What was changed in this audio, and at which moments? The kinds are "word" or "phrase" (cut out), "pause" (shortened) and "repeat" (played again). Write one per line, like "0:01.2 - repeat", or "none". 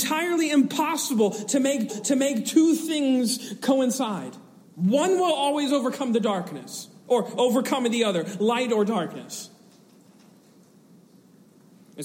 0:01.9 - repeat
0:04.6 - pause
0:07.0 - pause